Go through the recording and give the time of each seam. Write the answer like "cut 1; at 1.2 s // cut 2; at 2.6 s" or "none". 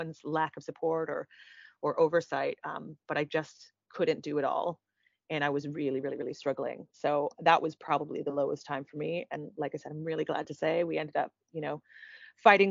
none